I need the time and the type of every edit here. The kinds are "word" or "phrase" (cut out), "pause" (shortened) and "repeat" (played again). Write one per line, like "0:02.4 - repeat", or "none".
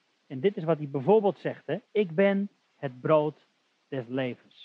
0:01.8 - pause